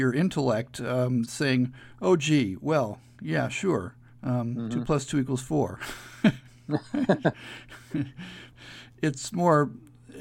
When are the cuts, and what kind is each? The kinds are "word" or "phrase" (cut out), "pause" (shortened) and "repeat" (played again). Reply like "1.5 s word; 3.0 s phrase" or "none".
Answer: none